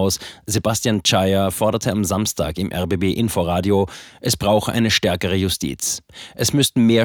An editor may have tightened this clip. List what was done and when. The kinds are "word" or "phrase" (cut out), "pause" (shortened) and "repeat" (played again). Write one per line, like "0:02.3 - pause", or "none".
none